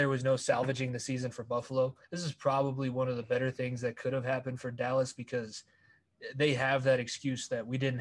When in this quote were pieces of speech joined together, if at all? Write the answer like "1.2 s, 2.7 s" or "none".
2.0 s